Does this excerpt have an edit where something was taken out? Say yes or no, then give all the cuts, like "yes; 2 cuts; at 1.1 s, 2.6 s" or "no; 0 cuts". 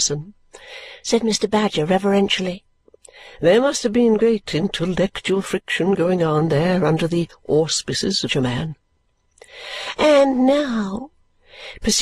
yes; 1 cut; at 8.3 s